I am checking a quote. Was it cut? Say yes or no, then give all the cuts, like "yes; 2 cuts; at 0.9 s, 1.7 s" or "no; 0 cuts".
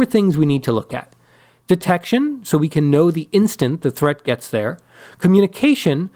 no; 0 cuts